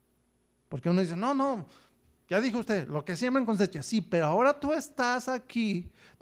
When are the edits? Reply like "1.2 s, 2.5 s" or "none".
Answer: none